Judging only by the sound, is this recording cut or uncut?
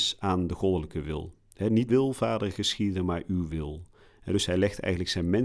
cut